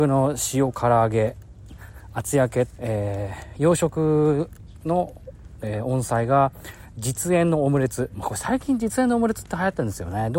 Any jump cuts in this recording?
yes; 1 cut; at 2.8 s

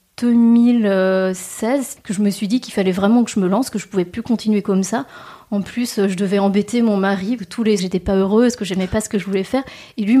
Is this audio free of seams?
no; 2 cuts; at 7.4 s, 7.8 s

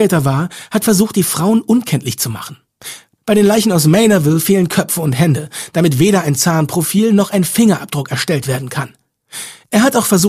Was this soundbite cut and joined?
no; 0 cuts

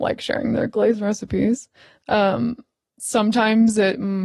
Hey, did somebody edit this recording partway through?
no; 0 cuts

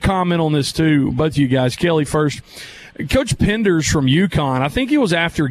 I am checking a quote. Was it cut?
no; 0 cuts

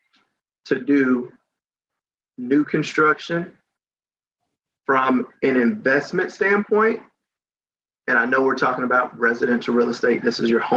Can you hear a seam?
no; 0 cuts

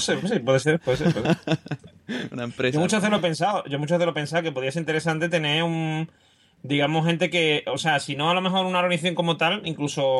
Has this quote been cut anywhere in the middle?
no; 0 cuts

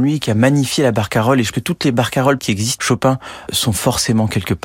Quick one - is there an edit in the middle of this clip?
yes; 4 cuts; at 1.5 s, 2.4 s, 2.8 s, 3.5 s

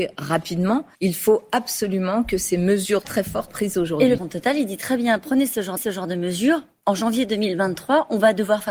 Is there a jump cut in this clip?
yes; 5 cuts; at 0.9 s, 3.0 s, 3.5 s, 4.2 s, 5.8 s

